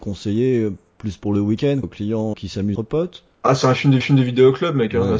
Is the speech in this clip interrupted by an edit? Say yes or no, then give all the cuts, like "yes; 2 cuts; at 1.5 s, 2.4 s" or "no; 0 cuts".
yes; 5 cuts; at 1.8 s, 2.3 s, 2.7 s, 3.3 s, 4.0 s